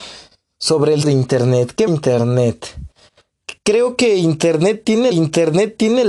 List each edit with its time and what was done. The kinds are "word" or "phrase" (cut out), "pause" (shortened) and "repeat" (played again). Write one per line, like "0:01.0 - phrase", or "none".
0:01.0 - word
0:01.9 - phrase
0:05.1 - repeat